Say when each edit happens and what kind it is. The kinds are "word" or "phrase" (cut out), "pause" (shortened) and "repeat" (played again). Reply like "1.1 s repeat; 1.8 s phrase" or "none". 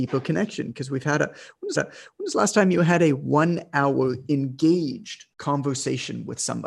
1.8 s repeat; 5.3 s pause